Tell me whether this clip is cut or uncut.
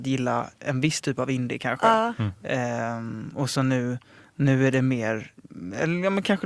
uncut